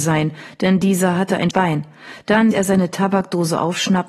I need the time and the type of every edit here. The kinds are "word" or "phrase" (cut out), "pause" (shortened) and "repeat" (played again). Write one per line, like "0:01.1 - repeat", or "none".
0:01.5 - word
0:02.5 - word